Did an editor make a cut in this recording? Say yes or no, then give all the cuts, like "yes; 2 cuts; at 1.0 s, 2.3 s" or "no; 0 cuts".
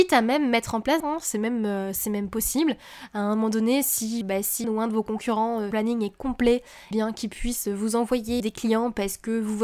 yes; 6 cuts; at 1.0 s, 4.2 s, 4.6 s, 5.7 s, 6.9 s, 8.4 s